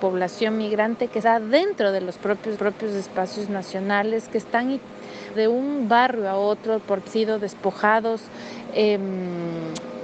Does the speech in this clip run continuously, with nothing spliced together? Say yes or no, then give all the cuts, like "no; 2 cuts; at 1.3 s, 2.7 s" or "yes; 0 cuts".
no; 4 cuts; at 1.2 s, 2.5 s, 5.3 s, 7.1 s